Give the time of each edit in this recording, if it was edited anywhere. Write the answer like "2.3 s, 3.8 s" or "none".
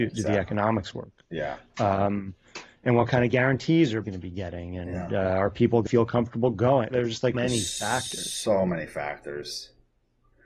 4.0 s, 5.9 s, 7.3 s